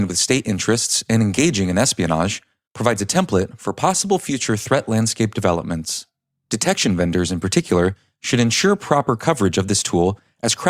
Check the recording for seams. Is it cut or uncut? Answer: uncut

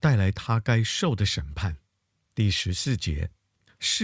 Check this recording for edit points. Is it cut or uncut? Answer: cut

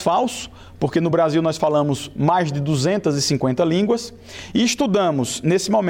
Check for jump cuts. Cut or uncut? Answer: uncut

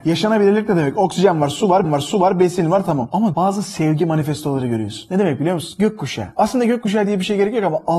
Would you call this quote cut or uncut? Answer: cut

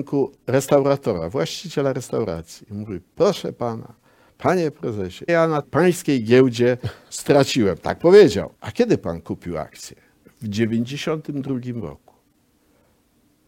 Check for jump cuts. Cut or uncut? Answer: cut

